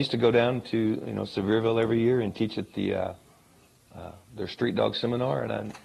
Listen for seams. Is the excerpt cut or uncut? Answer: uncut